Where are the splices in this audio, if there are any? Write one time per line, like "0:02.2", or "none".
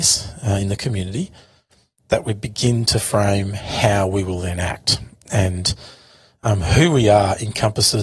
none